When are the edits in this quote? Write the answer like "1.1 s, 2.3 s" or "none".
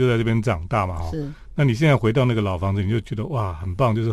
none

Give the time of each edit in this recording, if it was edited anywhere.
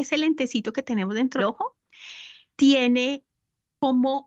1.4 s

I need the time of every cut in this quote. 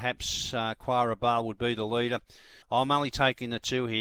2.6 s

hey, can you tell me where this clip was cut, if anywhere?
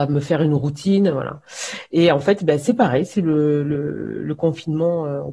none

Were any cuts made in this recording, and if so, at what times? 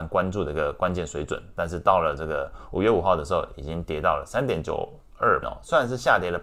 5.4 s

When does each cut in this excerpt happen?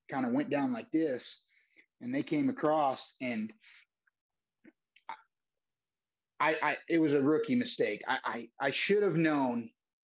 none

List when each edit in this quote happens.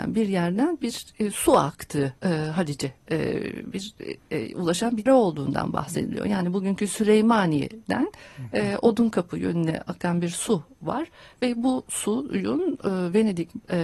2.2 s, 5.1 s

